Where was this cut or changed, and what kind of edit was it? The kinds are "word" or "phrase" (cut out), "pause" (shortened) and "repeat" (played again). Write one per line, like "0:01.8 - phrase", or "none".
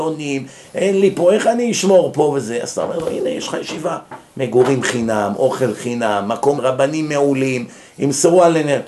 0:06.6 - word